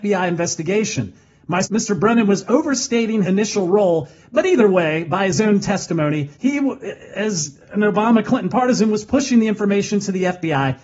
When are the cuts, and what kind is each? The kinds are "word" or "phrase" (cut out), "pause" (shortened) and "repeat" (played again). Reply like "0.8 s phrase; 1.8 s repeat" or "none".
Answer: 1.6 s phrase; 3.2 s word; 6.3 s pause